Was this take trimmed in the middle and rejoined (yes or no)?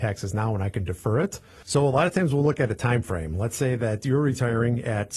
no